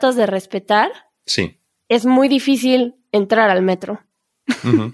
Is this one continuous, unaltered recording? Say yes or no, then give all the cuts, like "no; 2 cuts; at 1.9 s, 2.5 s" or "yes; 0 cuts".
yes; 0 cuts